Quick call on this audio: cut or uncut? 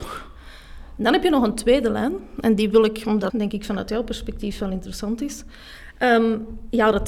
cut